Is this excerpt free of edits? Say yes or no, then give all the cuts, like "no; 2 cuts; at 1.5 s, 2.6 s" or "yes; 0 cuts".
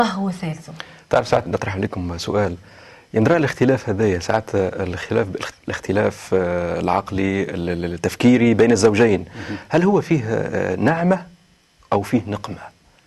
no; 2 cuts; at 1.5 s, 5.5 s